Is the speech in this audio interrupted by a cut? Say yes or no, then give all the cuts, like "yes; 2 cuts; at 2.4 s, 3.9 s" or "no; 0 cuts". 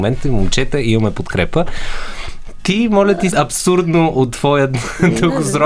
yes; 1 cut; at 3.3 s